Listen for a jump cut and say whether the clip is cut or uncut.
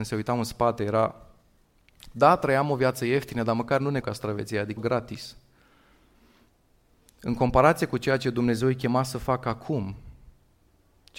cut